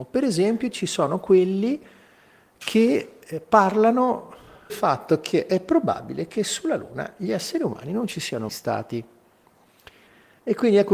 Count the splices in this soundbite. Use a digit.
2